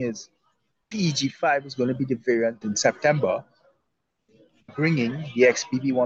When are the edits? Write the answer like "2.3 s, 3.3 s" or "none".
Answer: 0.9 s, 2.6 s, 4.7 s